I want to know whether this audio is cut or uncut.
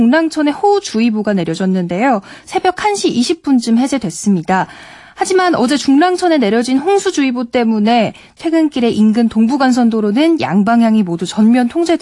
uncut